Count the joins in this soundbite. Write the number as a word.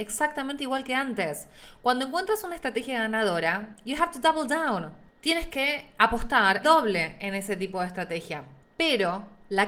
one